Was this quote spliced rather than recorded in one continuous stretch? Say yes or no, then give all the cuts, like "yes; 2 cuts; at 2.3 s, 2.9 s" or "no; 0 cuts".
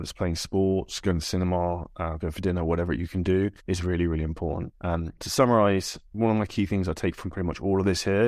yes; 2 cuts; at 3.6 s, 5.2 s